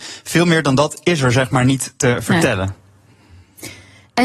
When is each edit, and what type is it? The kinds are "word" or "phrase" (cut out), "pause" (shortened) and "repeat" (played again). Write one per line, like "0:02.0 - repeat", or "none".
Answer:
none

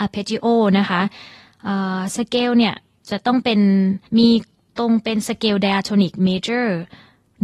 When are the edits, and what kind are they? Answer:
0:04.1 - pause

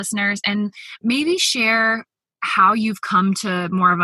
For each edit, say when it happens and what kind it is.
none

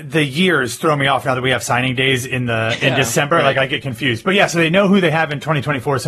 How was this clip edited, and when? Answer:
none

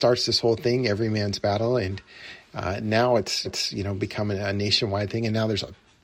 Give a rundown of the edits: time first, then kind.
0:03.4 - repeat

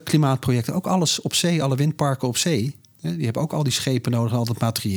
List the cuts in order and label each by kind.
none

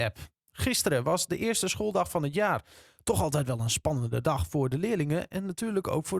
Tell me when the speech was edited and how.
none

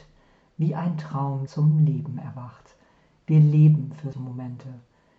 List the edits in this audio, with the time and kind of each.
0:01.5 - word
0:04.1 - word

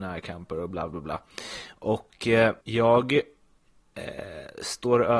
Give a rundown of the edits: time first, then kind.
0:02.6 - pause

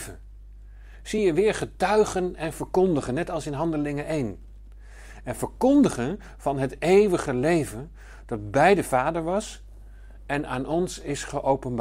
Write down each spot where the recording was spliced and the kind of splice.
none

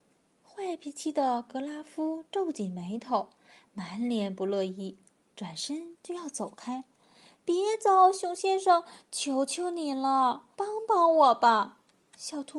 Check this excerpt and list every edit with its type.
0:10.5 - pause

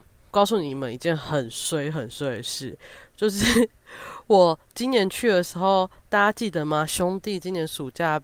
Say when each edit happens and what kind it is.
none

